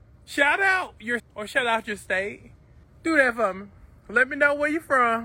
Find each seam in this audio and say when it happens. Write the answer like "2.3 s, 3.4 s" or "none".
1.2 s, 2.8 s

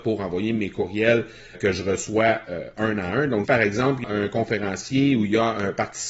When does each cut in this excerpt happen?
1.5 s, 3.4 s, 4.0 s

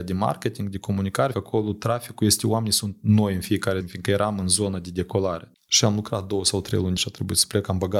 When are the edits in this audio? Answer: 1.3 s, 3.8 s, 7.0 s

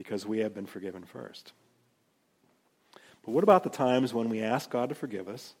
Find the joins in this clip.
none

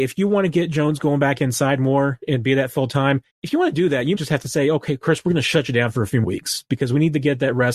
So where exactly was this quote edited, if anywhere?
3.3 s, 4.2 s, 6.2 s

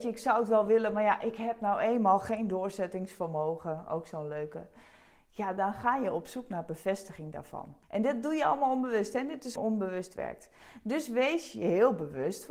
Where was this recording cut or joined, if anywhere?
7.8 s, 9.6 s

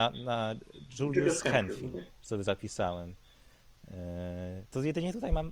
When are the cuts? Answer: 2.1 s

